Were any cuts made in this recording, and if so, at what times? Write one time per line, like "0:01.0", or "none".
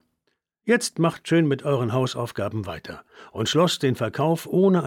none